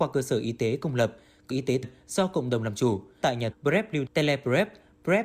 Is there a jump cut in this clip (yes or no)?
yes